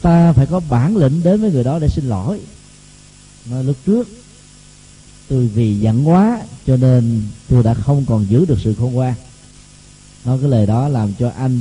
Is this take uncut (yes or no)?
yes